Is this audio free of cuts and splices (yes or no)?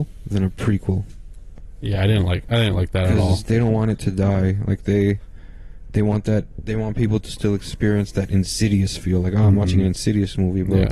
yes